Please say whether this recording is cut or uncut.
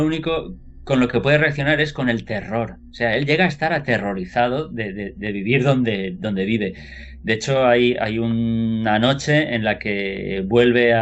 uncut